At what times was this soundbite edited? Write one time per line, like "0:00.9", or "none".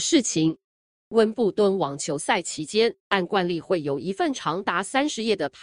0:03.0